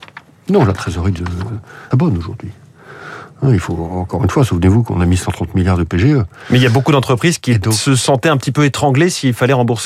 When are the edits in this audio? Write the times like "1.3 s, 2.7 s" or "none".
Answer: 1.9 s